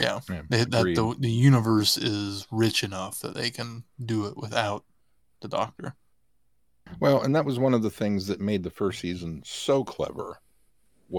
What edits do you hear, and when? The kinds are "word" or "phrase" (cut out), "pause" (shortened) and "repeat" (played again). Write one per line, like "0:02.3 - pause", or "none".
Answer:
none